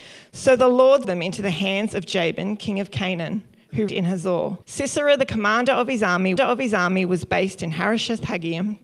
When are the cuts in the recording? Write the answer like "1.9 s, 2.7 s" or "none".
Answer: 1.0 s, 3.9 s, 4.6 s, 6.4 s